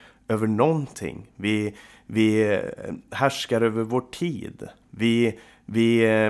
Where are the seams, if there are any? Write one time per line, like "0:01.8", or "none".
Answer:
none